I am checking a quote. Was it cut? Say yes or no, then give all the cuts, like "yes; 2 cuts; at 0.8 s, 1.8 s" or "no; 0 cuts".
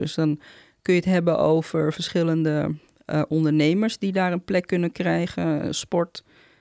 no; 0 cuts